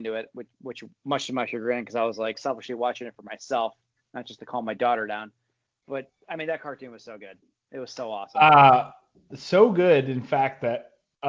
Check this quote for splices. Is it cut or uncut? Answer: uncut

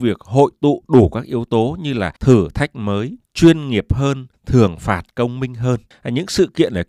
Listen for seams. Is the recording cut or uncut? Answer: cut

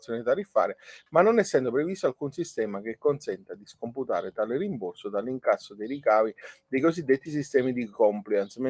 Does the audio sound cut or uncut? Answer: uncut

